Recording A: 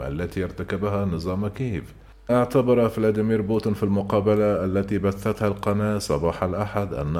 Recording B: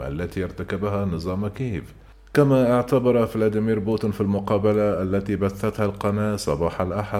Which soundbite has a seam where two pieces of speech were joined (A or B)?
A